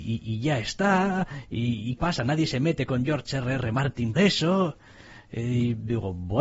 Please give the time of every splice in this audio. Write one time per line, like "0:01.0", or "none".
0:02.0
0:04.1

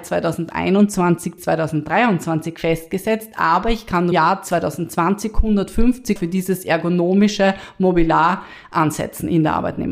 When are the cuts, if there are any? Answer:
0:01.4
0:04.1
0:06.2

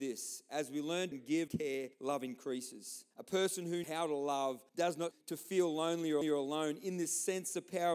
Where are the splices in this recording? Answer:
0:01.1
0:01.5
0:01.9
0:03.1
0:03.8
0:04.7
0:05.1
0:06.2

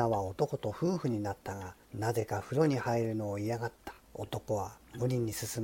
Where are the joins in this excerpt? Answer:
0:01.8
0:04.0

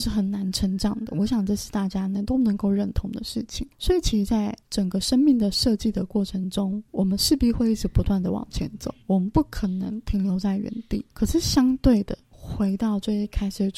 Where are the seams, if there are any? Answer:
0:03.7
0:04.6
0:06.9
0:09.0
0:11.1
0:12.2

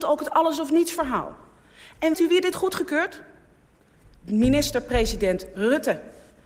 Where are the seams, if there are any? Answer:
0:02.1
0:02.5

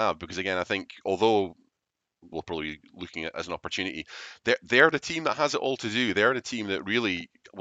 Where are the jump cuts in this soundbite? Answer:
0:02.3
0:02.9
0:03.3

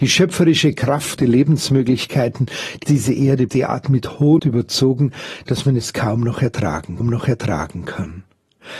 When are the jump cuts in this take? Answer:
0:01.2
0:02.8
0:03.5
0:04.4
0:07.0

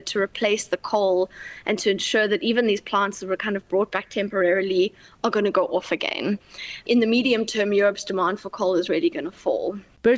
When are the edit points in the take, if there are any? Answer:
none

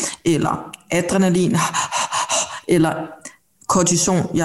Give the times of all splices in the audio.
none

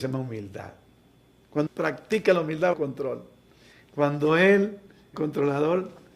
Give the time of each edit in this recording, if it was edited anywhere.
0:01.7
0:02.7
0:05.1

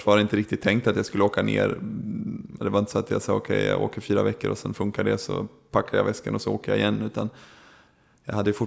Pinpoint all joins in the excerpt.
none

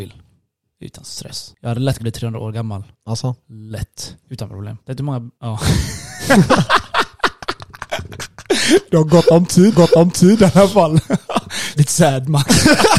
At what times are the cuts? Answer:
0:02.0
0:02.9
0:04.2
0:04.8
0:05.4
0:09.7
0:11.8

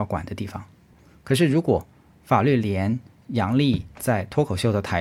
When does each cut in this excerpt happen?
none

